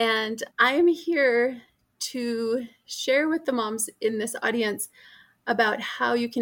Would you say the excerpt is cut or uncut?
uncut